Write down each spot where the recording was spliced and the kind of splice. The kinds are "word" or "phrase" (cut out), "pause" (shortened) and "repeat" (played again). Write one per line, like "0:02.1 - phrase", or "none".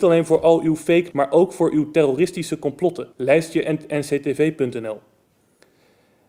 0:01.1 - word
0:03.1 - pause